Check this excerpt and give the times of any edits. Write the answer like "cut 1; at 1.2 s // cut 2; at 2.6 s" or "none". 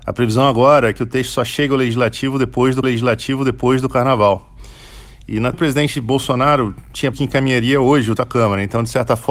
cut 1; at 2.8 s // cut 2; at 5.5 s // cut 3; at 7.1 s // cut 4; at 8.2 s